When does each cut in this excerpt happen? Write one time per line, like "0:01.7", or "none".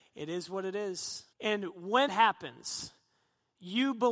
0:01.3
0:02.1